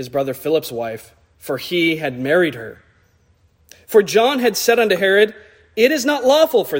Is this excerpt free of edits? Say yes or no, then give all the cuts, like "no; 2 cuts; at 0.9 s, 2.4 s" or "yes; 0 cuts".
yes; 0 cuts